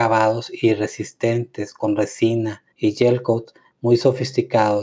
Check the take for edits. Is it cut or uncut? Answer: cut